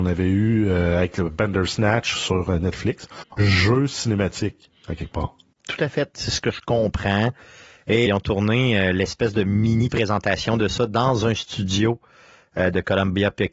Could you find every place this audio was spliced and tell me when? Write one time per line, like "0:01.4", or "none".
0:03.4
0:08.1